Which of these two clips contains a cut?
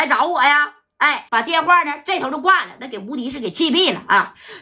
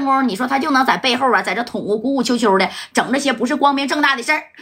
first; 1 cut; at 1.3 s

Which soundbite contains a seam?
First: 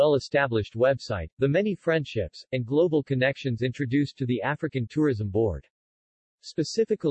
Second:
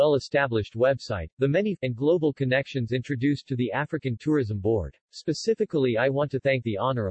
second; 2 cuts; at 1.8 s, 5.0 s

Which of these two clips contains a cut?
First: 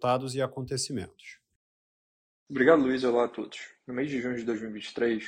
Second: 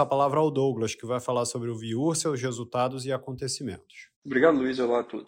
second; 1 cut; at 4.1 s

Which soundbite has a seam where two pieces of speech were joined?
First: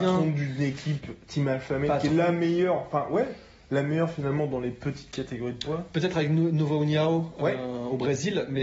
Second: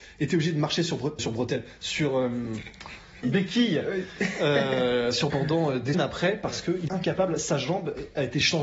second; 5 cuts; at 1.2 s, 3.2 s, 5.3 s, 5.9 s, 6.9 s

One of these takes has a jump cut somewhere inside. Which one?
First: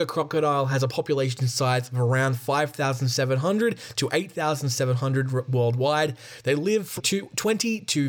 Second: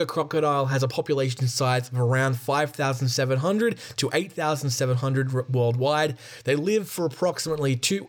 first; 1 cut; at 7.0 s

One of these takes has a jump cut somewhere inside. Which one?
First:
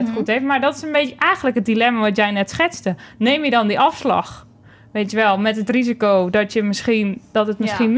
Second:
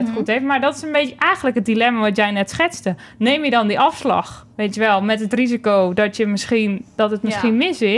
second; 1 cut; at 4.5 s

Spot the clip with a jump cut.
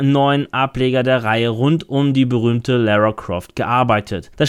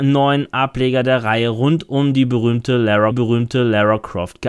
second; 1 cut; at 3.1 s

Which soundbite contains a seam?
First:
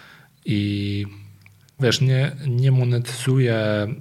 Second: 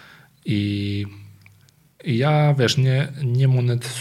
first; 1 cut; at 1.8 s

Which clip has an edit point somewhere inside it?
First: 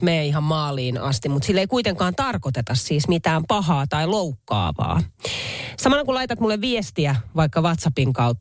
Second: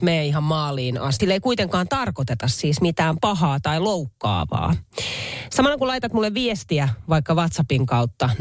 second; 1 cut; at 1.2 s

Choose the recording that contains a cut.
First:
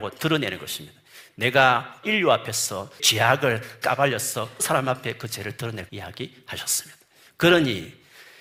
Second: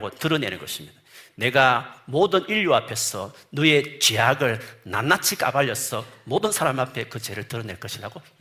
first; 5 cuts; at 2.0 s, 3.0 s, 3.8 s, 4.6 s, 5.9 s

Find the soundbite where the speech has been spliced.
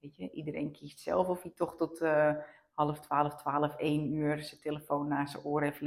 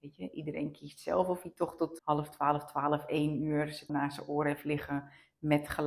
second; 2 cuts; at 2.0 s, 3.9 s

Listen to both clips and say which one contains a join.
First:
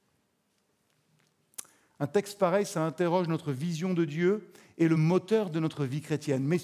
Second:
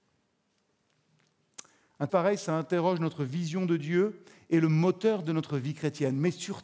second; 1 cut; at 2.1 s

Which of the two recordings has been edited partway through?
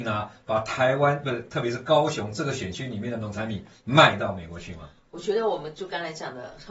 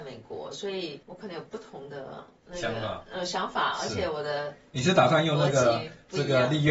second; 1 cut; at 1.0 s

